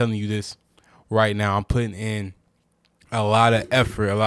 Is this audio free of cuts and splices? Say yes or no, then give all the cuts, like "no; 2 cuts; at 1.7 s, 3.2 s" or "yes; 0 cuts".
yes; 0 cuts